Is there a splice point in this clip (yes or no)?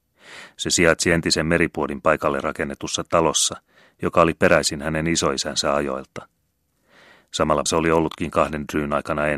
yes